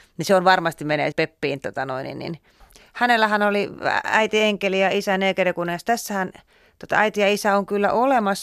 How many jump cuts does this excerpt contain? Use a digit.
1